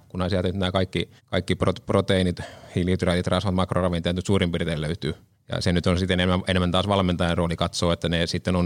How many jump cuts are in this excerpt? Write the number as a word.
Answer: two